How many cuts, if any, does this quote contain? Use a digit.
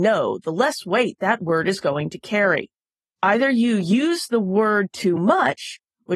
0